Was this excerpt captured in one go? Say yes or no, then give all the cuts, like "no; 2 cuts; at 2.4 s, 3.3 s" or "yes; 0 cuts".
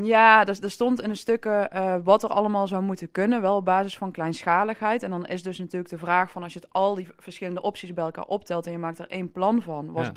yes; 0 cuts